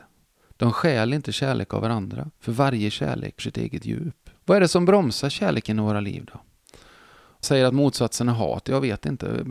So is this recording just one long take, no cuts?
no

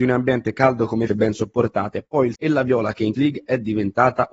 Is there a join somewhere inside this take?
yes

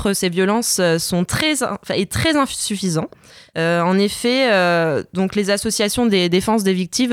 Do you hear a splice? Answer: no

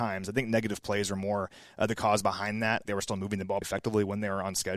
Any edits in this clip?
yes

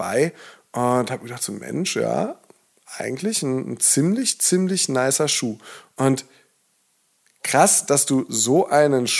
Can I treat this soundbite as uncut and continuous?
yes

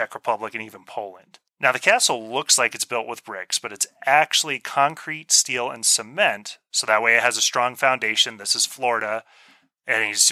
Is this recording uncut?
no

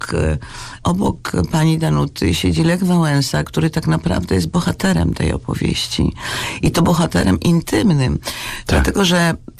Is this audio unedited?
yes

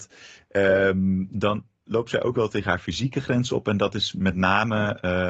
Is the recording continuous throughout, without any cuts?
yes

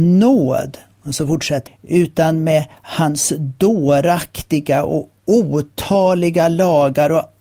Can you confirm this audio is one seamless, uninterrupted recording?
no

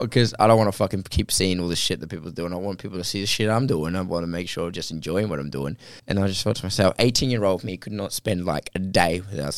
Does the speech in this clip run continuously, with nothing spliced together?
no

